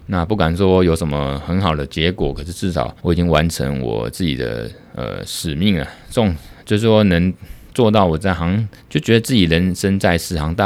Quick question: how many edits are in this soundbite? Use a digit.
2